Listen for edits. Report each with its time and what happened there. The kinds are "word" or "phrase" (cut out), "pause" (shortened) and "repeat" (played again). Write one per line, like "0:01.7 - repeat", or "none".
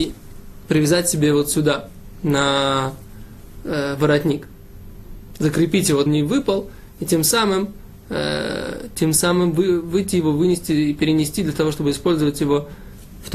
0:06.1 - phrase